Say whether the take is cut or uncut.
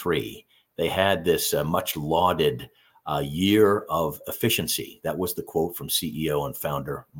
uncut